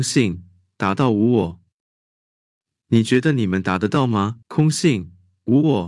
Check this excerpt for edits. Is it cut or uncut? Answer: cut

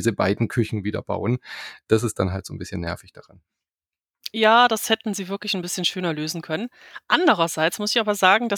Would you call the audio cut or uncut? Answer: uncut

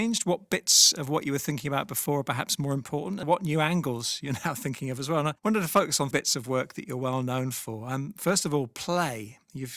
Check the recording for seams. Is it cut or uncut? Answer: cut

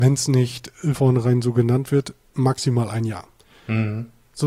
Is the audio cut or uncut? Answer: cut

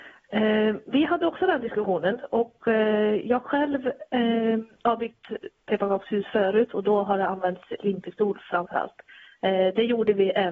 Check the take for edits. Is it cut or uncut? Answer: uncut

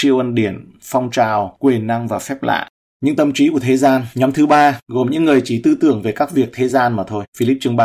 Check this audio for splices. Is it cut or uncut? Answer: uncut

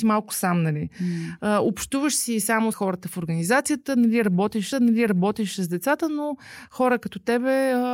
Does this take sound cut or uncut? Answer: cut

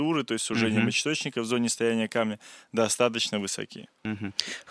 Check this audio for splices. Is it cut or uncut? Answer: uncut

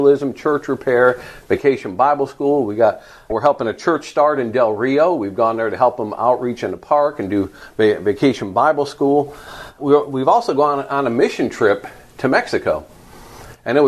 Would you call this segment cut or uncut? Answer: uncut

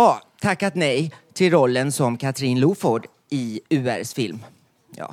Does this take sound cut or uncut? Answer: uncut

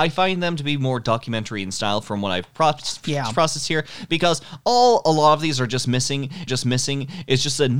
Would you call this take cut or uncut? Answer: cut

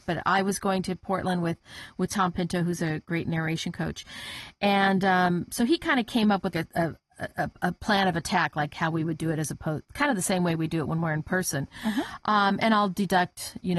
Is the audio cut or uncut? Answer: cut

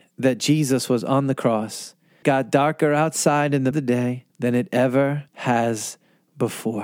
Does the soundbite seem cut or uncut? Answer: cut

